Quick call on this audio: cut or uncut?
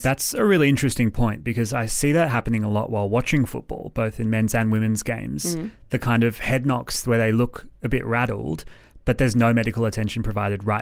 uncut